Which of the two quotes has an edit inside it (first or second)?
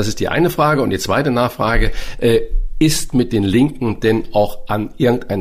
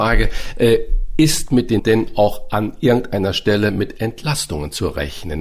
second